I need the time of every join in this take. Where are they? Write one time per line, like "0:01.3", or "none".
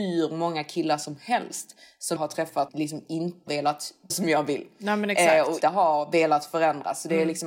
0:02.2
0:02.7
0:03.5
0:04.1
0:05.6

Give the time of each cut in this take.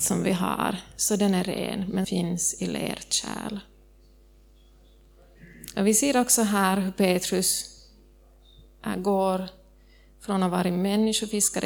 0:02.0

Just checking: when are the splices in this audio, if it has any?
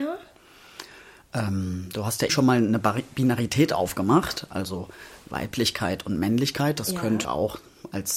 0:02.3
0:07.2

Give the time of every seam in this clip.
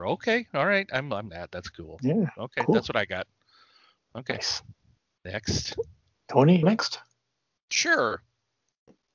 0:01.3
0:06.6

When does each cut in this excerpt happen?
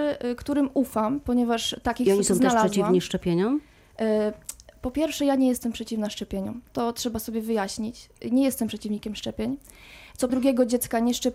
0:10.3

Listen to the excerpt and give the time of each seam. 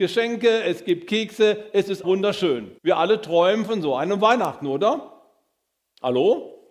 0:02.0
0:02.8

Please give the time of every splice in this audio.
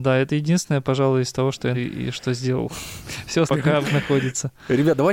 0:01.7
0:03.5
0:03.8

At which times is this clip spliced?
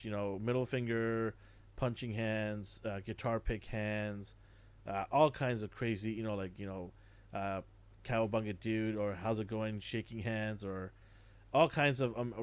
none

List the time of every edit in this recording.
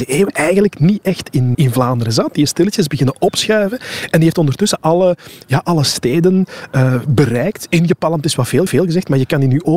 0:01.5
0:08.7

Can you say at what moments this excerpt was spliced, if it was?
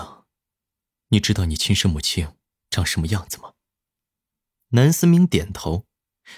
none

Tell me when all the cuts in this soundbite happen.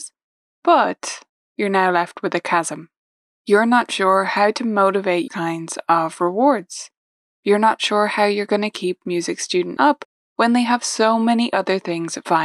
0:01.3
0:05.3
0:09.8

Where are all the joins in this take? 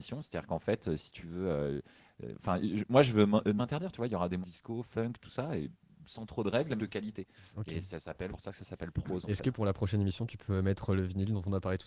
0:03.6
0:04.4
0:06.8
0:08.3

